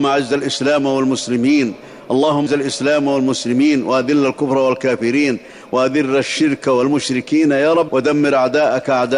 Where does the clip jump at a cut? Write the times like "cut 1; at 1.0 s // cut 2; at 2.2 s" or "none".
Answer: cut 1; at 2.5 s // cut 2; at 7.9 s